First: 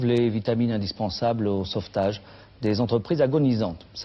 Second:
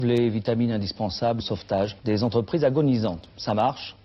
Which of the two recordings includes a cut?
second; 2 cuts; at 1.4 s, 2.0 s

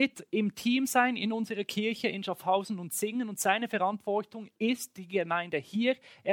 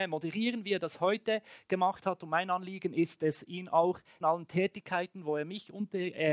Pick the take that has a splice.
second; 1 cut; at 4.2 s

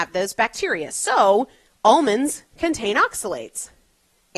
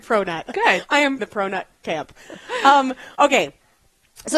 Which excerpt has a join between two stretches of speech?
second; 2 cuts; at 1.2 s, 3.1 s

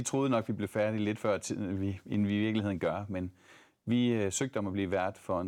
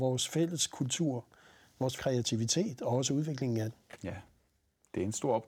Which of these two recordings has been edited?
second; 1 cut; at 2.0 s

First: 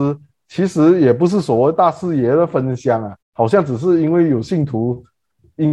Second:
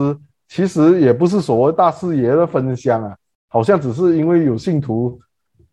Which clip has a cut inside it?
first; 1 cut; at 3.2 s

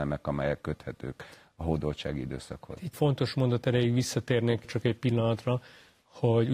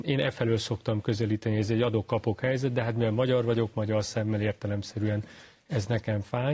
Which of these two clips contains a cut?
first; 2 cuts; at 2.9 s, 4.6 s

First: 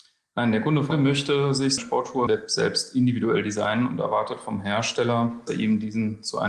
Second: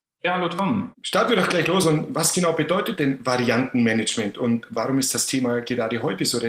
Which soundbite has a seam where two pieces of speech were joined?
first; 4 cuts; at 0.9 s, 1.8 s, 2.3 s, 5.5 s

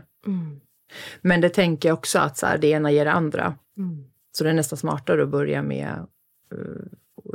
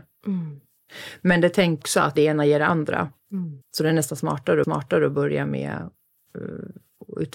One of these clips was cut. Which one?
second; 4 cuts; at 1.8 s, 2.2 s, 3.6 s, 4.6 s

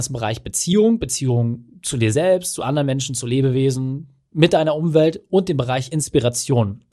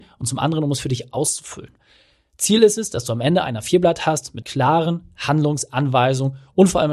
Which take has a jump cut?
second; 1 cut; at 4.4 s

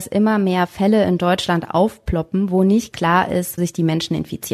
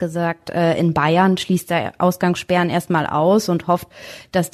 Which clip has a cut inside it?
first; 2 cuts; at 2.9 s, 3.6 s

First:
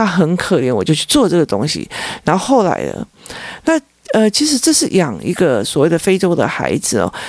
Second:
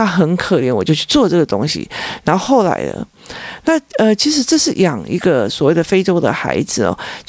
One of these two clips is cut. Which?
second; 1 cut; at 3.9 s

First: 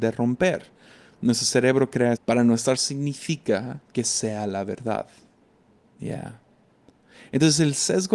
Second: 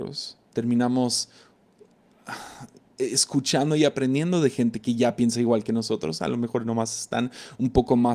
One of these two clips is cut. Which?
first; 3 cuts; at 2.2 s, 2.8 s, 3.8 s

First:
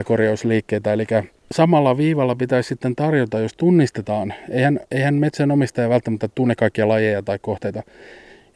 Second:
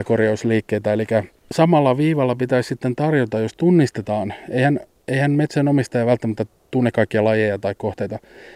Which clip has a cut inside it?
first; 2 cuts; at 4.9 s, 6.3 s

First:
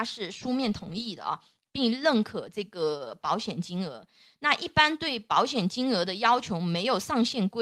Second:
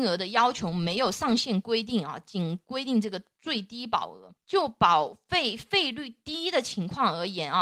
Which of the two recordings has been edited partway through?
second; 1 cut; at 4.4 s

